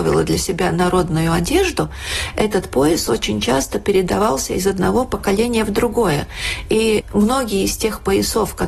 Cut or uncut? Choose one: uncut